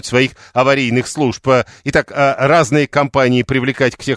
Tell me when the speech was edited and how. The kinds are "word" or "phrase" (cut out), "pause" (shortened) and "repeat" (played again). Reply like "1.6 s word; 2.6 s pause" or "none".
none